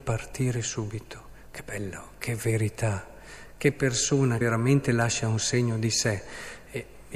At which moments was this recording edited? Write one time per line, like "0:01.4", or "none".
0:04.4